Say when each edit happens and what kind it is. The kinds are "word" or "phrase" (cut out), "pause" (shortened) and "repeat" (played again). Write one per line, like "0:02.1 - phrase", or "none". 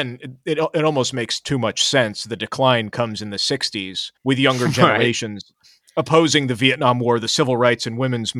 0:04.2 - pause

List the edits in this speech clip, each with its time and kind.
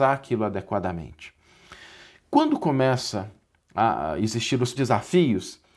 0:04.8 - word

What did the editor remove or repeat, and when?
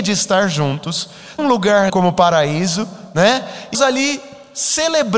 0:01.4 - word
0:01.9 - word
0:03.7 - word

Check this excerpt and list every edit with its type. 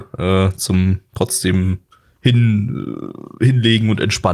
none

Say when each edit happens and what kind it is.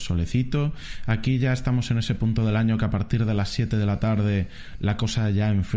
none

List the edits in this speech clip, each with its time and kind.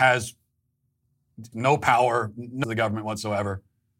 0:01.5 - word
0:02.6 - word

